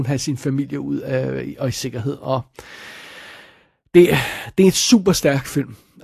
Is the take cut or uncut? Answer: uncut